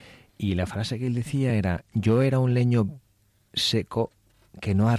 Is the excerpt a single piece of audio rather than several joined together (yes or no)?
yes